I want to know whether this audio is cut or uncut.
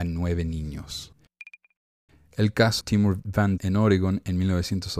cut